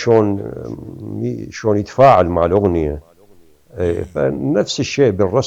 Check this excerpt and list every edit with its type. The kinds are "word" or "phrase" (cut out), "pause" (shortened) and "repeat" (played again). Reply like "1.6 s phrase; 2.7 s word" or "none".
none